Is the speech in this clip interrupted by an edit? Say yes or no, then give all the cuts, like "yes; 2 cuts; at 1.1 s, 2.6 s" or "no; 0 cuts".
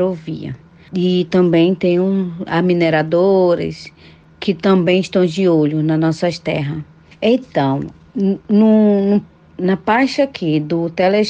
no; 0 cuts